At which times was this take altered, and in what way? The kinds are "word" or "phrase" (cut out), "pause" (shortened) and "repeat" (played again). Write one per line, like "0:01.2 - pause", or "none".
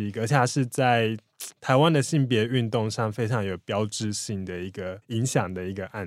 0:05.0 - pause